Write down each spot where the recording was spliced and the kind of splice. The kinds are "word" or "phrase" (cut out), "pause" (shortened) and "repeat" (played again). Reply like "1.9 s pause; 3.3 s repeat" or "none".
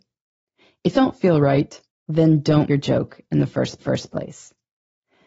0.9 s word; 1.9 s pause; 2.7 s word; 3.8 s repeat

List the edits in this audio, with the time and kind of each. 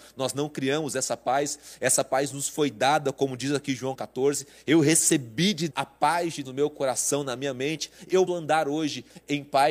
4.0 s word; 5.7 s word; 6.4 s word; 8.3 s word

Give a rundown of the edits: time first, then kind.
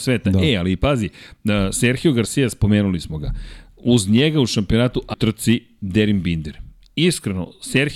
5.1 s phrase

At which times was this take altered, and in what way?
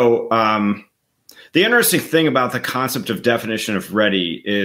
none

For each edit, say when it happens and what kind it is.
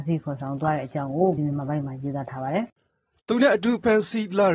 1.4 s word; 2.7 s pause

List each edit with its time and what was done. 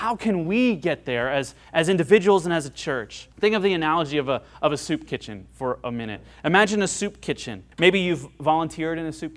3.3 s pause; 7.7 s pause

